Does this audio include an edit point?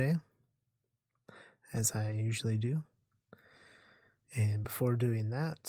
no; 0 cuts

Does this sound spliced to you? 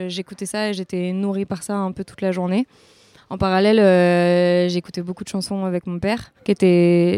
no; 0 cuts

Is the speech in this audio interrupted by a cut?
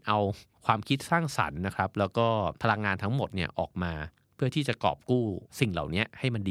yes; 1 cut; at 2.6 s

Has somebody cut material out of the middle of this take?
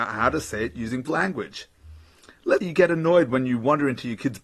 yes; 2 cuts; at 1.0 s, 2.6 s

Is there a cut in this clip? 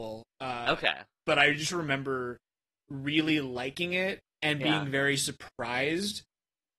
no; 0 cuts

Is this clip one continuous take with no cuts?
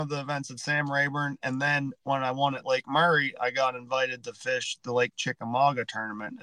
yes; 0 cuts

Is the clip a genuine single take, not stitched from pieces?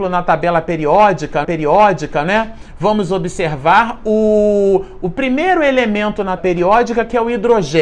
no; 2 cuts; at 1.4 s, 6.4 s

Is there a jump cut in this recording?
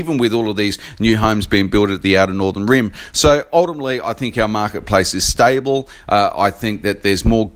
no; 0 cuts

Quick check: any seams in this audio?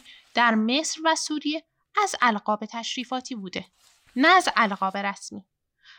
no; 0 cuts

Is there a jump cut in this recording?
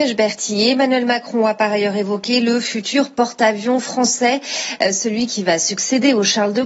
no; 0 cuts

